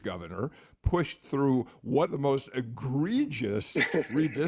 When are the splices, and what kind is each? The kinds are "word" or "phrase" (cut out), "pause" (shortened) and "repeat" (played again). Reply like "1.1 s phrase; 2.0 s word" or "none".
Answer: 2.1 s word